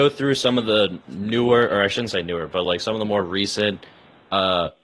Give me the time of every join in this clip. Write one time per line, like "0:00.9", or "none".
none